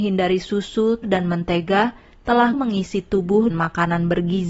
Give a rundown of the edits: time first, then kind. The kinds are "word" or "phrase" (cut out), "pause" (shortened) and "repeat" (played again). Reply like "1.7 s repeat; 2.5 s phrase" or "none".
1.0 s word; 2.5 s word; 3.5 s word